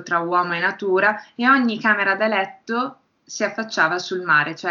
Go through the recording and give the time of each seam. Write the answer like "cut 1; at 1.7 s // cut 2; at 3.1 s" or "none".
none